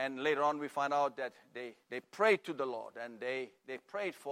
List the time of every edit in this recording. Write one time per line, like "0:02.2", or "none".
0:01.8

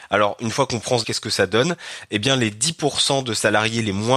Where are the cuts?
0:01.0

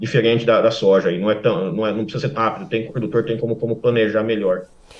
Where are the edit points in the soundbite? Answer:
0:02.3
0:02.9
0:03.6

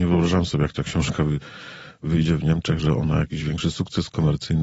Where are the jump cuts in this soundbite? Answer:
none

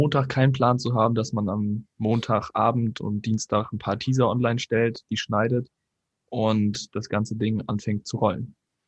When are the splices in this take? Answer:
none

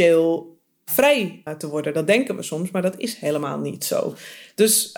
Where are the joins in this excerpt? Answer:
0:01.5

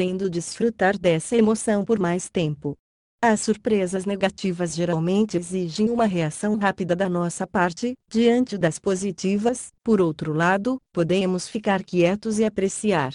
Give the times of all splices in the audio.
none

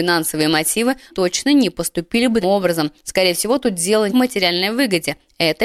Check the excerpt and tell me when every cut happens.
0:01.1
0:02.4
0:04.1

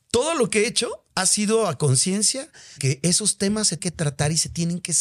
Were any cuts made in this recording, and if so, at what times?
0:01.1
0:02.8
0:03.8

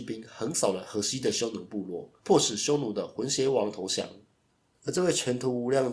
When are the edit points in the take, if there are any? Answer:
0:02.2

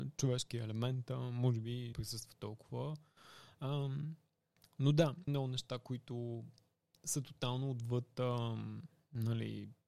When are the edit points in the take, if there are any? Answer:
0:01.9
0:05.3

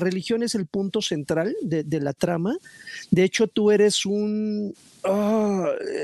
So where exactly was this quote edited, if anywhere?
none

